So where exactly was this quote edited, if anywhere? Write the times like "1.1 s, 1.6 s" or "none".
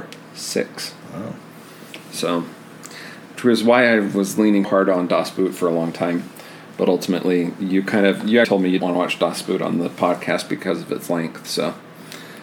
4.6 s, 8.4 s, 8.8 s